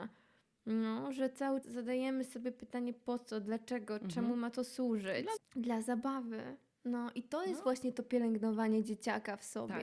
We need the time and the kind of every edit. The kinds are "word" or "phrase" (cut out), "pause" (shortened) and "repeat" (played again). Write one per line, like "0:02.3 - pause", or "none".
0:01.6 - word
0:05.4 - word